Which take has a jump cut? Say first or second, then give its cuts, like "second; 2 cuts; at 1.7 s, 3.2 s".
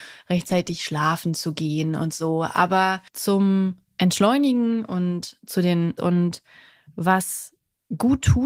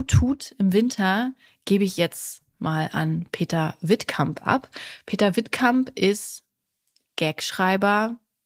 first; 2 cuts; at 3.1 s, 6.0 s